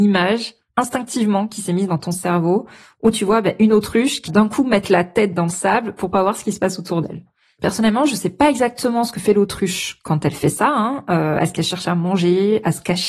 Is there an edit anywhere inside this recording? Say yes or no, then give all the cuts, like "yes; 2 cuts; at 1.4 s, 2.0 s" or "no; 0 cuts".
yes; 1 cut; at 4.3 s